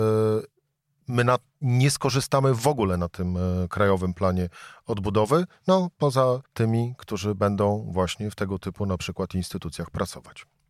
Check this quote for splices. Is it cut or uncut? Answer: cut